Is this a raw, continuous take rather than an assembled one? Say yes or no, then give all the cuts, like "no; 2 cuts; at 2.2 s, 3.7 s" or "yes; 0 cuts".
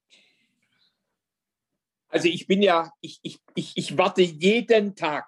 no; 1 cut; at 3.0 s